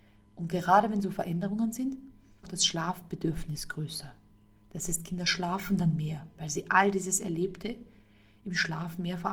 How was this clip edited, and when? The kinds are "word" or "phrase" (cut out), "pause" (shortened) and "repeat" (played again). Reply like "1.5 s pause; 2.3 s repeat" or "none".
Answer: 2.4 s phrase

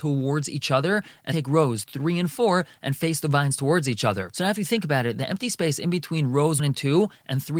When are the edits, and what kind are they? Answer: 1.3 s word; 6.6 s word

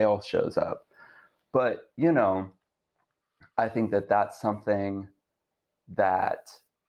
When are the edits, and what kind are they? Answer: none

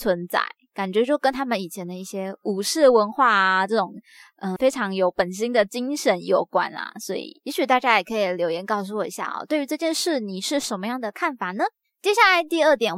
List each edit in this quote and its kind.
4.6 s word

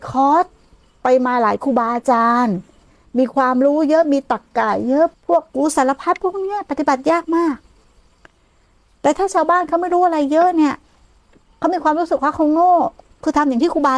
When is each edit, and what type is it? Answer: none

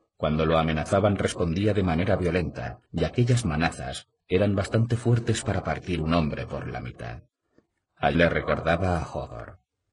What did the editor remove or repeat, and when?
2.8 s pause; 8.1 s word

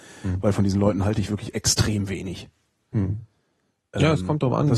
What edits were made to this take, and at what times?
none

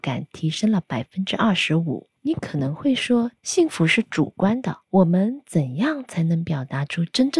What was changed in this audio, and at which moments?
2.2 s pause; 3.4 s pause; 4.8 s pause

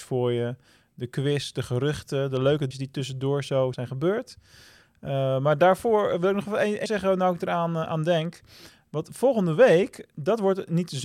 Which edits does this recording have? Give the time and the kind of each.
2.7 s word; 3.7 s word; 6.9 s word

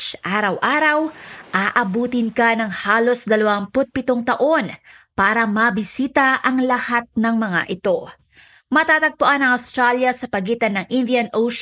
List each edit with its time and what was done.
none

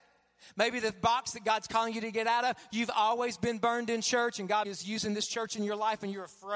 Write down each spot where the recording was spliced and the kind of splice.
4.6 s word

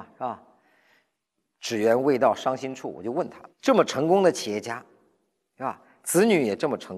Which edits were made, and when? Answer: 3.5 s pause

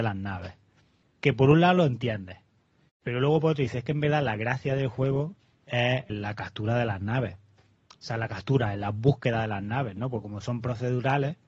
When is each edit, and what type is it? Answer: 6.1 s word

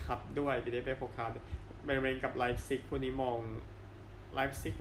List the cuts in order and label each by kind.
none

